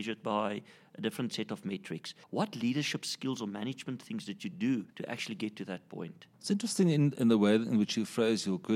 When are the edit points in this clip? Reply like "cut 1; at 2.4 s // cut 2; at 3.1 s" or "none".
cut 1; at 2.2 s // cut 2; at 4.9 s // cut 3; at 7.1 s